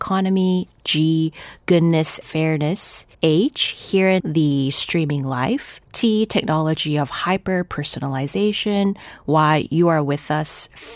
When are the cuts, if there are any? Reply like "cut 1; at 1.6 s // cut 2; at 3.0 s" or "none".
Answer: cut 1; at 2.2 s // cut 2; at 3.1 s // cut 3; at 4.2 s // cut 4; at 5.8 s